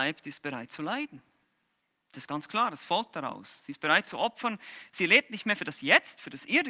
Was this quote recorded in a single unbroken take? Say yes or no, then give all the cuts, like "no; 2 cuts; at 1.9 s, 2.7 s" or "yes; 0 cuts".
yes; 0 cuts